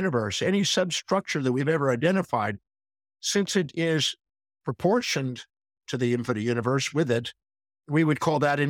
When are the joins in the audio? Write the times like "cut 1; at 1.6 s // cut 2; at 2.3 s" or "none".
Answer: none

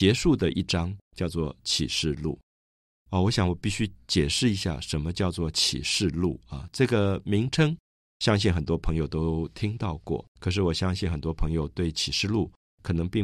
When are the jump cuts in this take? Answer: cut 1; at 10.3 s

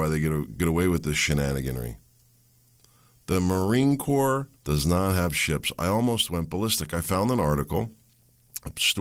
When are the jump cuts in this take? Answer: cut 1; at 4.6 s

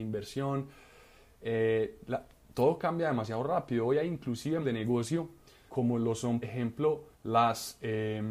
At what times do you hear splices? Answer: cut 1; at 4.6 s // cut 2; at 5.7 s // cut 3; at 6.4 s // cut 4; at 7.1 s

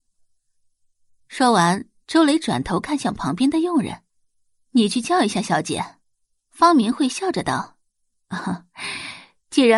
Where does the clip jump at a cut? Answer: cut 1; at 4.1 s // cut 2; at 6.2 s // cut 3; at 7.8 s

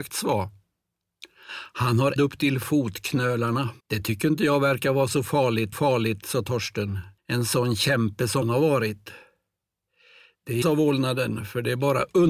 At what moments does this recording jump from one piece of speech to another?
cut 1; at 2.2 s // cut 2; at 3.8 s // cut 3; at 5.7 s // cut 4; at 7.2 s // cut 5; at 8.4 s // cut 6; at 10.6 s

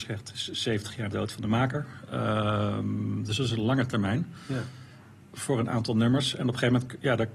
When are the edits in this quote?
cut 1; at 1.1 s

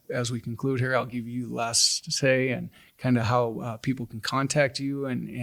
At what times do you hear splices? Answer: none

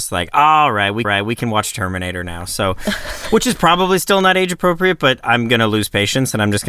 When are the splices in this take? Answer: cut 1; at 1.0 s

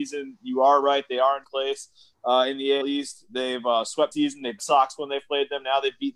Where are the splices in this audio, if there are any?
cut 1; at 1.4 s // cut 2; at 2.8 s // cut 3; at 4.1 s // cut 4; at 4.6 s

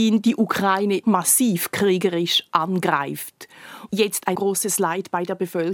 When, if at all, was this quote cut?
cut 1; at 1.0 s // cut 2; at 3.9 s // cut 3; at 4.3 s

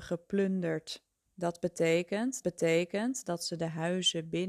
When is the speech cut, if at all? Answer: cut 1; at 1.3 s // cut 2; at 2.4 s

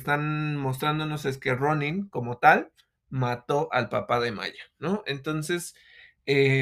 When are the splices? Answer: none

